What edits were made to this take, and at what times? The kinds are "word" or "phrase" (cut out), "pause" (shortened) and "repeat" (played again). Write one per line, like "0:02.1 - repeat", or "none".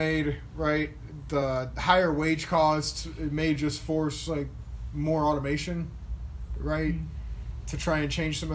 none